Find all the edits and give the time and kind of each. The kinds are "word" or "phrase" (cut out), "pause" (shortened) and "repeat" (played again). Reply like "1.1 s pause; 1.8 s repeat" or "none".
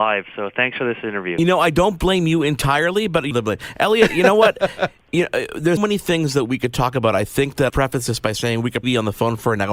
3.3 s phrase; 5.8 s word; 7.7 s phrase; 8.8 s word